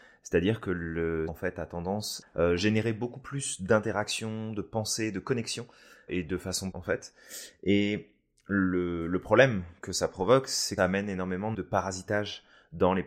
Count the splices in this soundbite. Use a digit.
6